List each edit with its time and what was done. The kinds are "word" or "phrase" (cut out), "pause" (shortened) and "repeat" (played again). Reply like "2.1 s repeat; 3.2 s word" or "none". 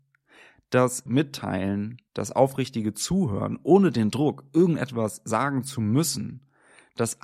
1.1 s word; 2.1 s pause